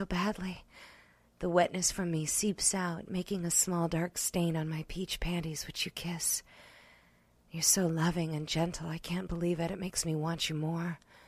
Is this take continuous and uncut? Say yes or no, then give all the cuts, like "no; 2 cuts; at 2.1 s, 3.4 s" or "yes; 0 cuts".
yes; 0 cuts